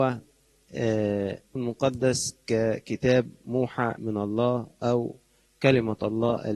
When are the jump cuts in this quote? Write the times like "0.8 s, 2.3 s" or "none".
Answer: 1.6 s, 4.0 s